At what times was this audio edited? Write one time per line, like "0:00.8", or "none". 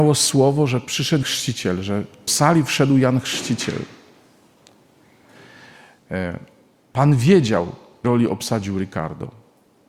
0:01.2
0:02.3
0:08.0